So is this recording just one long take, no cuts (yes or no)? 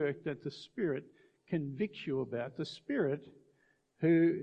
yes